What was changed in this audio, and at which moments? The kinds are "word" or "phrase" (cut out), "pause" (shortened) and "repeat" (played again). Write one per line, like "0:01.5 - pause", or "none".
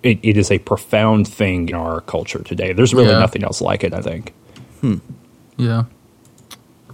0:01.7 - word
0:04.0 - word